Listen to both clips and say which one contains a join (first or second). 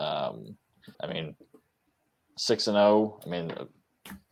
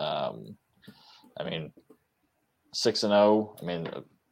first